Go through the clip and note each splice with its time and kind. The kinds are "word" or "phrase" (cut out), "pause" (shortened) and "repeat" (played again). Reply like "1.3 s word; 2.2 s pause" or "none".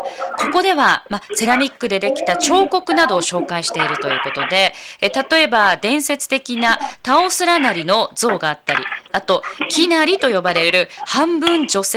none